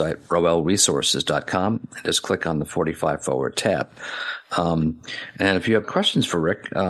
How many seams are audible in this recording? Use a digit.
1